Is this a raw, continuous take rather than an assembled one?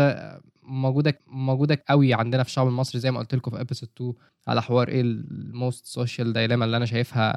no; 1 cut; at 1.2 s

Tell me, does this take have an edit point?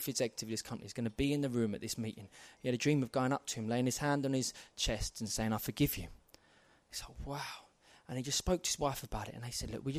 no; 0 cuts

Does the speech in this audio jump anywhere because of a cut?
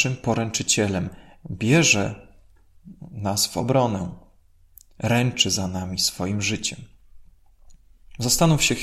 no; 0 cuts

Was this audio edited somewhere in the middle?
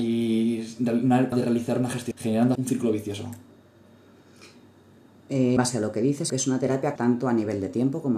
yes; 6 cuts; at 1.3 s, 2.1 s, 2.5 s, 5.6 s, 6.3 s, 7.0 s

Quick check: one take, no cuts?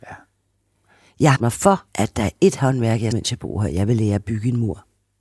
no; 3 cuts; at 1.3 s, 1.9 s, 3.1 s

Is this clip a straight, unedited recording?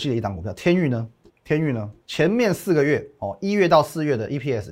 no; 2 cuts; at 1.3 s, 2.0 s

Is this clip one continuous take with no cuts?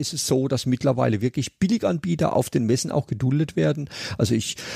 yes; 0 cuts

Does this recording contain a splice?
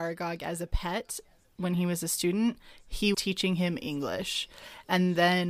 yes; 1 cut; at 3.1 s

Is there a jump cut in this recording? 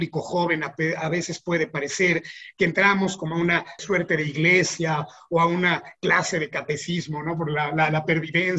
yes; 1 cut; at 3.8 s

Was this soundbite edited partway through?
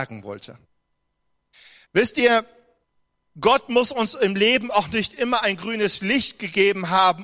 no; 0 cuts

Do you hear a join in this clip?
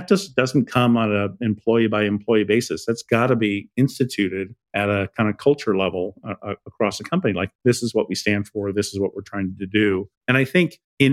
yes; 3 cuts; at 4.6 s, 7.6 s, 10.2 s

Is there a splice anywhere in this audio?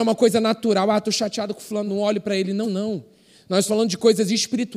yes; 3 cuts; at 1.9 s, 2.6 s, 3.7 s

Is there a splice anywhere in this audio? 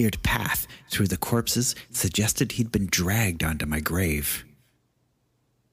no; 0 cuts

